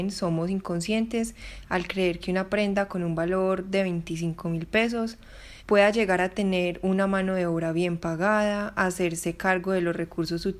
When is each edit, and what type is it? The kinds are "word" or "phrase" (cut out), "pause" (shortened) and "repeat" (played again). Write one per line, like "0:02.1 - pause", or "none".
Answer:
0:05.6 - pause